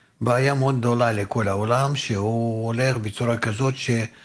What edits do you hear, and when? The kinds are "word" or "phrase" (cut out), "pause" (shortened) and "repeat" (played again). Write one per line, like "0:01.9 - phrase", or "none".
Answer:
none